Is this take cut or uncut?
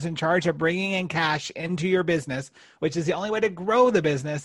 uncut